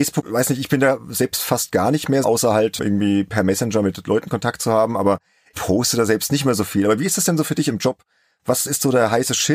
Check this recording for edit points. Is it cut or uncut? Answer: cut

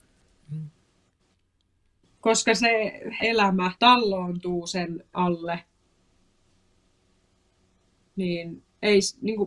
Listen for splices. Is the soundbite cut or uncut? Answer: cut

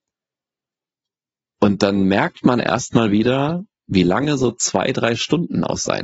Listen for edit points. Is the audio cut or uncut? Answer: uncut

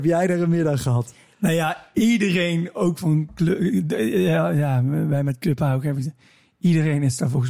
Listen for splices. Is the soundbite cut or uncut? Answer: uncut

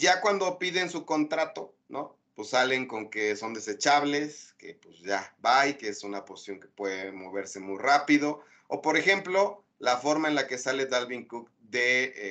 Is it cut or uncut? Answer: uncut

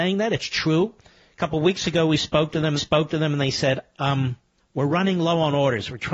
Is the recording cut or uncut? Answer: cut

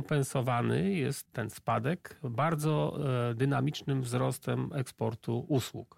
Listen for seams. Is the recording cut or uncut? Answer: cut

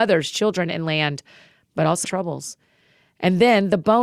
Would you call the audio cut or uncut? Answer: cut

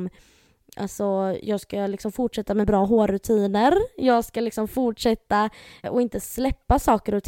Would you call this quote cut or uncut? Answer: cut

